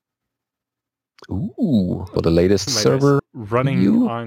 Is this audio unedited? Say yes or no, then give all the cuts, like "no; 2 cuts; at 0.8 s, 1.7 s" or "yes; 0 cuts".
no; 3 cuts; at 2.2 s, 2.7 s, 3.2 s